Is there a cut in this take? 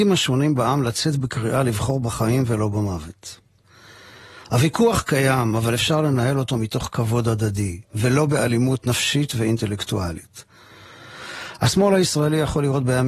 yes; 1 cut; at 7.9 s

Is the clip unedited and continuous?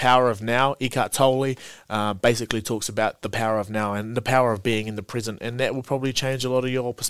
yes; 0 cuts

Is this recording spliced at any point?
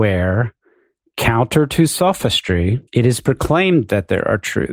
yes; 1 cut; at 2.9 s

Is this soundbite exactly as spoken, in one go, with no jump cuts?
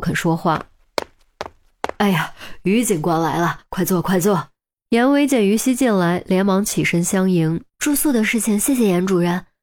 no; 2 cuts; at 4.7 s, 7.7 s

